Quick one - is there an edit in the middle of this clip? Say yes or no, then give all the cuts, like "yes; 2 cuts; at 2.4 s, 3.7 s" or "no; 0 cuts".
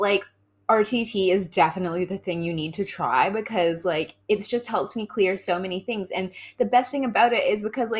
no; 0 cuts